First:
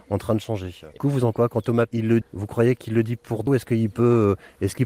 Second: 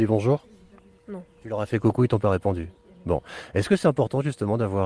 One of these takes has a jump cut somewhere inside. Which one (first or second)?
first